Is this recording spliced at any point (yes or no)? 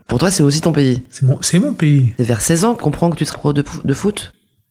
yes